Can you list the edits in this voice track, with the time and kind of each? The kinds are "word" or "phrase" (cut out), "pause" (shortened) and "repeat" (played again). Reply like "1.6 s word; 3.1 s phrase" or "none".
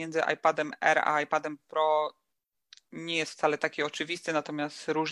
none